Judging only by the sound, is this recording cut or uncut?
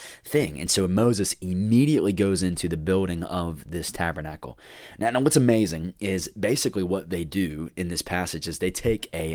uncut